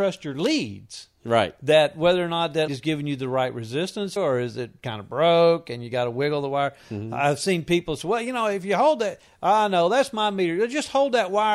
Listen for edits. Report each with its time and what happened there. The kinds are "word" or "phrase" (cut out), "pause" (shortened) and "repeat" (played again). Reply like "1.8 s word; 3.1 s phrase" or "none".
2.7 s word; 4.2 s word